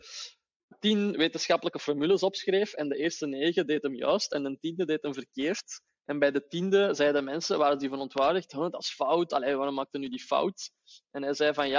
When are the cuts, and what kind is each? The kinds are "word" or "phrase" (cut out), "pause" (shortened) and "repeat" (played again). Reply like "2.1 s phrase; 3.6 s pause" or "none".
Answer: none